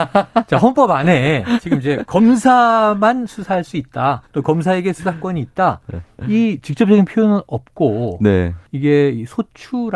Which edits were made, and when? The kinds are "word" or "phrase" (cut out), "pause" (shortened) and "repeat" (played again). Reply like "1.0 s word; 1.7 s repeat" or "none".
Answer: 4.3 s pause; 8.7 s pause